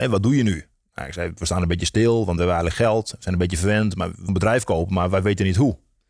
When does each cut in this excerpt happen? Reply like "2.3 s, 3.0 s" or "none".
4.3 s